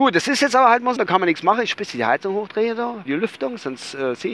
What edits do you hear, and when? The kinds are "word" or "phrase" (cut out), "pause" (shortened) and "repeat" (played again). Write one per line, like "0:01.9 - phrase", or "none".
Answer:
0:01.0 - word
0:01.7 - word
0:03.1 - word